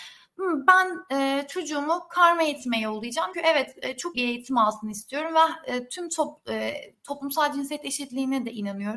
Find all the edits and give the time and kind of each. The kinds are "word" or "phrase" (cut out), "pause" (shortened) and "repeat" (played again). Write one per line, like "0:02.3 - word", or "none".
0:03.3 - word
0:04.1 - word